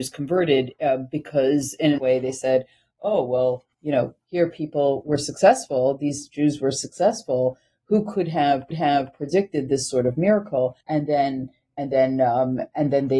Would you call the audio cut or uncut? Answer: cut